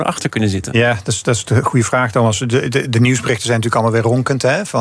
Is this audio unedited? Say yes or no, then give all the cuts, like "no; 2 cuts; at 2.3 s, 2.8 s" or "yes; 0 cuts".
yes; 0 cuts